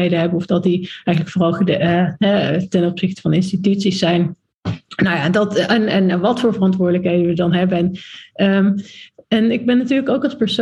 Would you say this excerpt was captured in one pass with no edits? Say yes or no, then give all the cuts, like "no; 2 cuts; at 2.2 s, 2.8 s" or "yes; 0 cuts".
yes; 0 cuts